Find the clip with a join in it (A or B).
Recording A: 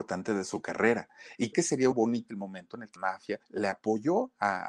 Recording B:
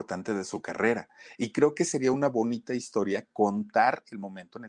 A